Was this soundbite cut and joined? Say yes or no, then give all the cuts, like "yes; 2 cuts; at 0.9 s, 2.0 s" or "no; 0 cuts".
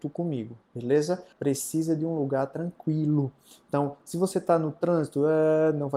yes; 1 cut; at 1.3 s